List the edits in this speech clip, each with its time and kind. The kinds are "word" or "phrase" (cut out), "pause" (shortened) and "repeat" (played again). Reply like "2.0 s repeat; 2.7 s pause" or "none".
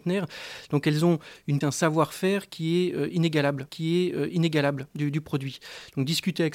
1.6 s word; 3.7 s repeat